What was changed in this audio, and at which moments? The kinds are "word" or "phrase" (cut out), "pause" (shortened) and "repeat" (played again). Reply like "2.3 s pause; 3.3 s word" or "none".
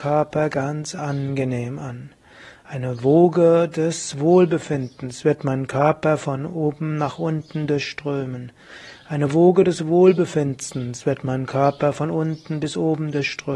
none